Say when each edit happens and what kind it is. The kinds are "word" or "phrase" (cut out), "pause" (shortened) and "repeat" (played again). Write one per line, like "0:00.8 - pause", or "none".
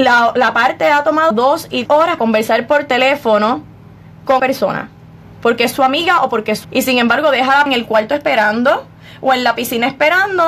0:01.3 - word
0:01.9 - word
0:02.2 - word
0:04.4 - word
0:06.6 - word
0:07.7 - word

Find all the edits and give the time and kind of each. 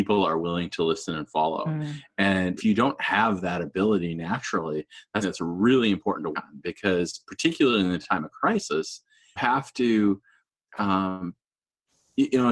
0:02.6 - word
0:05.2 - word
0:06.3 - word
0:09.4 - word

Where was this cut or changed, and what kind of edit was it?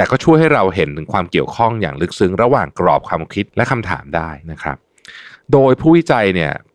0:03.5 - pause
0:04.4 - pause

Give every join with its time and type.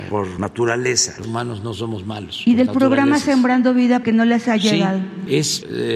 0:01.2 - word
0:04.0 - word

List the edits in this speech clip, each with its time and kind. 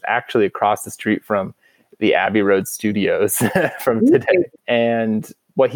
none

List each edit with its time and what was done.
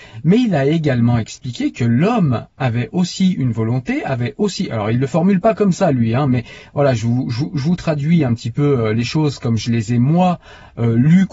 none

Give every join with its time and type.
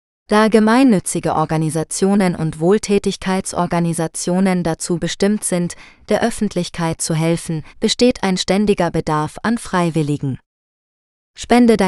0:07.7 - pause

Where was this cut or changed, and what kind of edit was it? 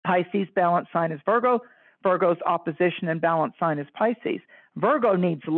none

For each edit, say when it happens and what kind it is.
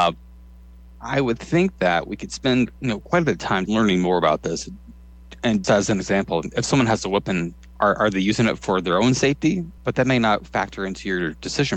0:02.8 - pause
0:03.7 - word
0:05.6 - word
0:09.8 - pause

